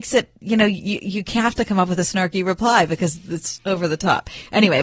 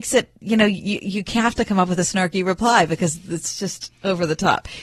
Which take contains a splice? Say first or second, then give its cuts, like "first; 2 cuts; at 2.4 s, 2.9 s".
first; 1 cut; at 3.6 s